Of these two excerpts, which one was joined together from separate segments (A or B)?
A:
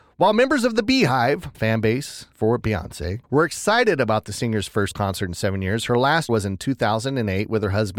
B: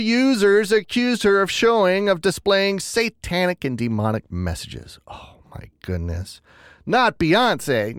A